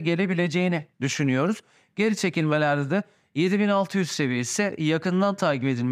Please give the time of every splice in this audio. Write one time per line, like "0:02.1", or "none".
0:00.9